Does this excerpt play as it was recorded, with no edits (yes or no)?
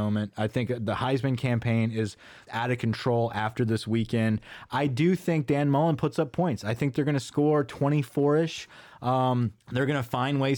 no